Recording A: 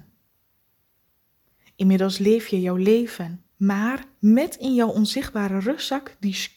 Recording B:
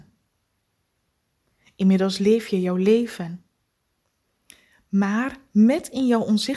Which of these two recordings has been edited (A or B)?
A